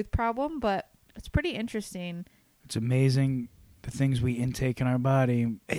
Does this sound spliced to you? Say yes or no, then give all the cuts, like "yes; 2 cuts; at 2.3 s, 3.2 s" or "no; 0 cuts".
no; 0 cuts